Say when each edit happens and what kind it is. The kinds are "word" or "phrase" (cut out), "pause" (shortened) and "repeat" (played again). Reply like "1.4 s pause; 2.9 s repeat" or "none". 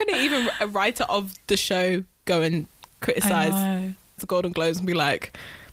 4.2 s word